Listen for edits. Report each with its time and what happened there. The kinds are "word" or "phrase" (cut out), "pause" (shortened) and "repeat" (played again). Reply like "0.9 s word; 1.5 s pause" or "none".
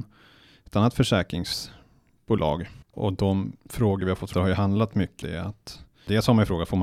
2.8 s pause; 3.6 s pause; 4.3 s word; 5.2 s word